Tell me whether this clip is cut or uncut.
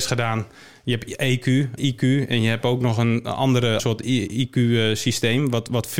cut